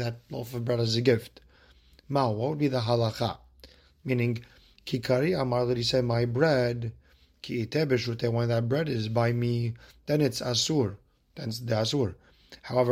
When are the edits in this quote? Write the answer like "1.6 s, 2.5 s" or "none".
none